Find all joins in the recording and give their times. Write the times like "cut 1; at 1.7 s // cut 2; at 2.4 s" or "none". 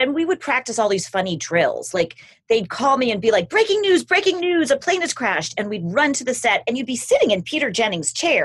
none